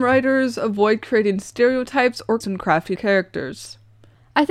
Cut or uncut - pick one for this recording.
cut